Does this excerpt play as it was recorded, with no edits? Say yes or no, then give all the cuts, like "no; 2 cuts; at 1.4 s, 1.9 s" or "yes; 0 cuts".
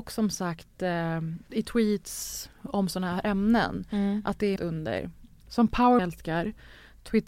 no; 3 cuts; at 1.5 s, 4.6 s, 6.0 s